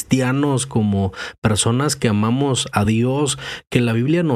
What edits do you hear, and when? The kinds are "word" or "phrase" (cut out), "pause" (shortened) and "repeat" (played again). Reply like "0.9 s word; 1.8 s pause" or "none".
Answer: none